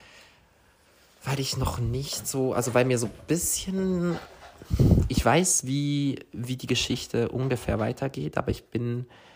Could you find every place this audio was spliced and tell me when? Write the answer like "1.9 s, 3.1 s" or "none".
none